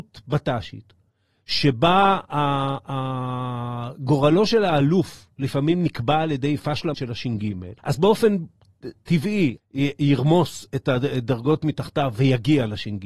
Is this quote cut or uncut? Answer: cut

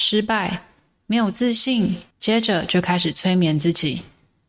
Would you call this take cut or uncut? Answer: cut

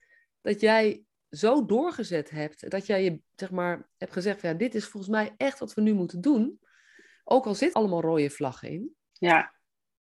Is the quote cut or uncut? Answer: cut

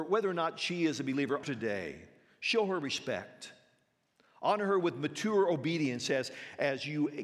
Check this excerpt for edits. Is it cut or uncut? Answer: cut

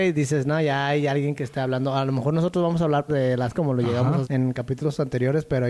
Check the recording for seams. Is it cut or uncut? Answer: cut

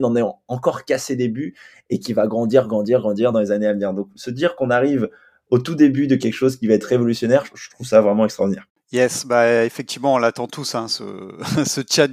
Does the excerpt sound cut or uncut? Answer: uncut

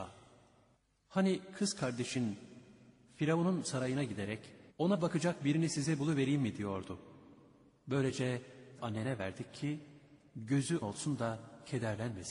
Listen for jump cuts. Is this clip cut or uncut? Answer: cut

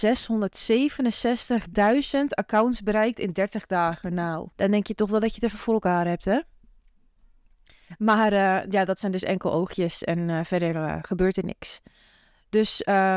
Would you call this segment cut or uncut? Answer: cut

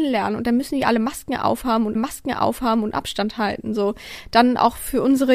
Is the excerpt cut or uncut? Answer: cut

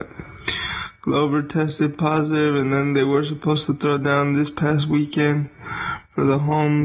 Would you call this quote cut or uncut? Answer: uncut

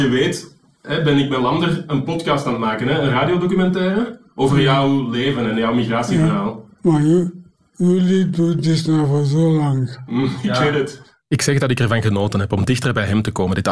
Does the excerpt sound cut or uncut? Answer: uncut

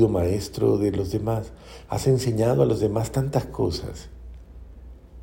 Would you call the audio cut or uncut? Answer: uncut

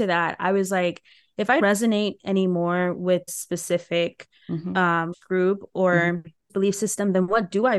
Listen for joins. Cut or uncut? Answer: cut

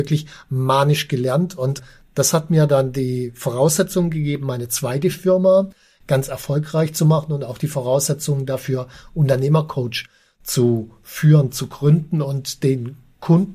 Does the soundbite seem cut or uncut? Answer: uncut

